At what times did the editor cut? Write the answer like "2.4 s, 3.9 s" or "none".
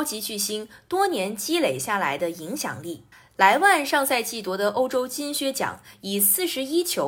3.1 s